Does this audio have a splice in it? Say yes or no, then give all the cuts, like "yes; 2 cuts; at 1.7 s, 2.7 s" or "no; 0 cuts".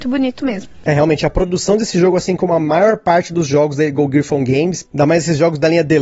no; 0 cuts